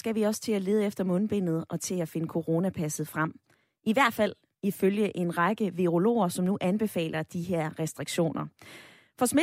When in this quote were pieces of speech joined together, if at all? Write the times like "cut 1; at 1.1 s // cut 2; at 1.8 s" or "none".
none